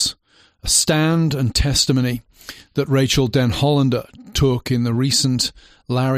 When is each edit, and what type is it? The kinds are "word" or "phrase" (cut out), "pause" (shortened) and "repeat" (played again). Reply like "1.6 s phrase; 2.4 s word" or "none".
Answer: none

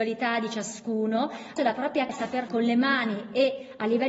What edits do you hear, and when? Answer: 1.6 s word; 2.1 s word; 2.5 s word

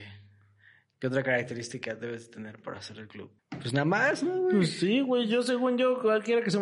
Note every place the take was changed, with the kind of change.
3.4 s pause

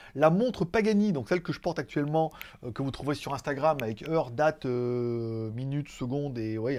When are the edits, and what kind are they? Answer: none

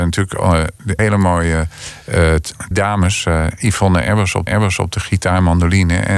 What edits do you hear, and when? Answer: 1.0 s word; 2.7 s word; 4.5 s repeat

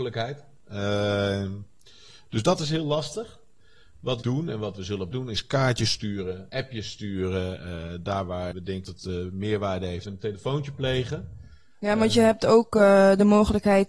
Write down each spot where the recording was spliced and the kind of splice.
4.2 s word; 5.1 s word; 6.5 s word; 8.5 s word; 8.8 s word; 10.1 s word

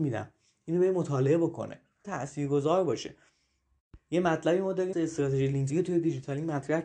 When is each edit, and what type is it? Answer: 2.0 s phrase; 4.9 s word; 5.7 s word

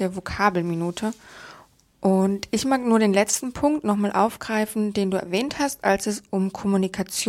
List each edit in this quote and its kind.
none

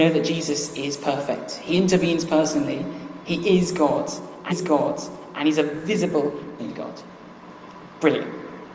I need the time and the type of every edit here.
4.5 s repeat; 6.6 s word

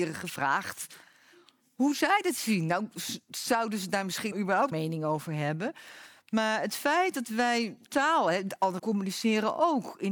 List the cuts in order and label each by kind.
4.3 s word; 4.7 s word; 7.9 s word; 8.8 s word

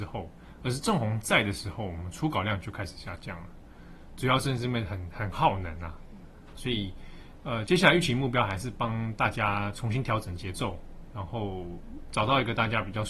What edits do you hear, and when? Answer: 6.6 s phrase

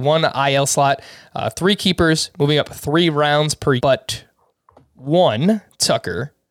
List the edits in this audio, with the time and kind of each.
3.8 s phrase

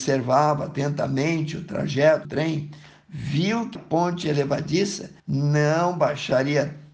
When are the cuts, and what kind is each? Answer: 2.2 s word; 3.7 s word; 5.2 s pause

